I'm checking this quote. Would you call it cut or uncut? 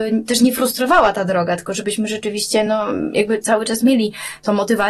uncut